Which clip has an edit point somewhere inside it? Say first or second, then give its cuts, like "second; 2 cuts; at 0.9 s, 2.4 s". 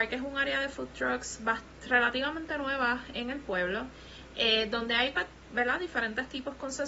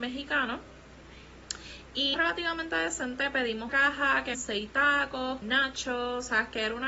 second; 4 cuts; at 2.1 s, 3.7 s, 4.3 s, 5.4 s